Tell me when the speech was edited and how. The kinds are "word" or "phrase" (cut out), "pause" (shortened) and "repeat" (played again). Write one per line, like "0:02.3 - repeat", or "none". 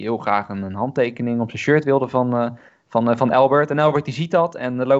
0:02.7 - pause